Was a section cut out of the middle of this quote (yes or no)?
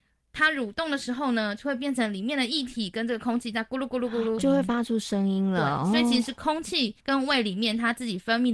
yes